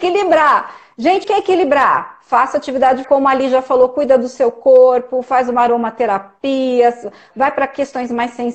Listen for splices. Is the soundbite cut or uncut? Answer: cut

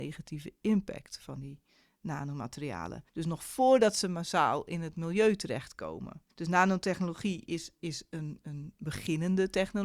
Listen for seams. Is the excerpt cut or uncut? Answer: cut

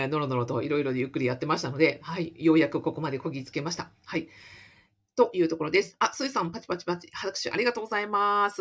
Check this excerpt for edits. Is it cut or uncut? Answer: uncut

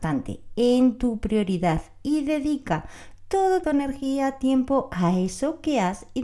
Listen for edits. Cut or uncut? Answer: cut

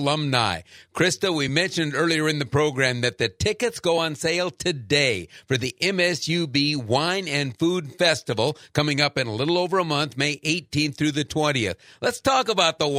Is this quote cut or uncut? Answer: uncut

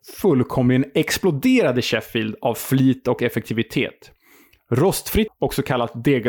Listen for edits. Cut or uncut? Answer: cut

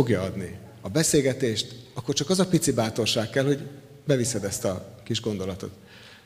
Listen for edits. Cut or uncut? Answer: uncut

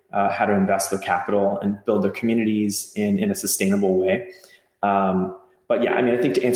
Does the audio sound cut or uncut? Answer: uncut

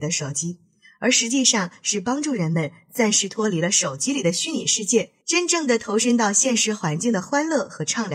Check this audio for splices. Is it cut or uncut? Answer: cut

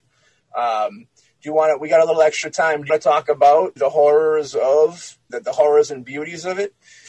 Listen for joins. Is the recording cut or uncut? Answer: cut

